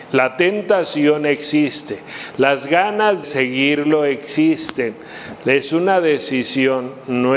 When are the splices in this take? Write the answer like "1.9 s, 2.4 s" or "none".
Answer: 3.2 s